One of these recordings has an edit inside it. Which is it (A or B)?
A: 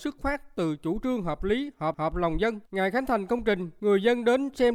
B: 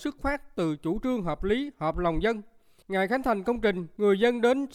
A